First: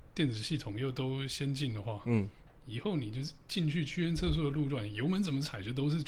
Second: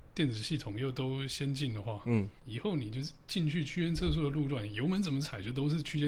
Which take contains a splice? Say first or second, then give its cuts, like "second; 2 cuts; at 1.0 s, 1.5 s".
second; 1 cut; at 2.4 s